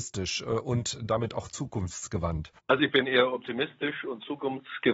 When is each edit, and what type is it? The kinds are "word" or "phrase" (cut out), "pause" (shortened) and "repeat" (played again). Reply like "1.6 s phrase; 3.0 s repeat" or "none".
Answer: 2.6 s pause